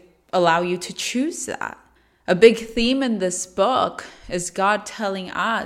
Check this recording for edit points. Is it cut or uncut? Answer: cut